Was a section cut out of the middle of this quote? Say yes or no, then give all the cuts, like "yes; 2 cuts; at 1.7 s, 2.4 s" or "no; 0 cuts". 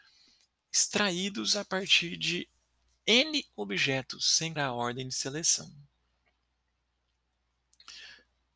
yes; 1 cut; at 4.6 s